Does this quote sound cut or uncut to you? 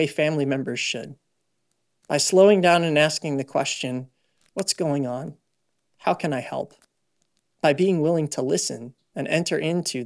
uncut